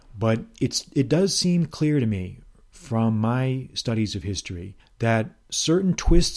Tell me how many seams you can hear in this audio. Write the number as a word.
one